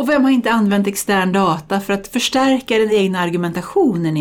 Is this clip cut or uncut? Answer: uncut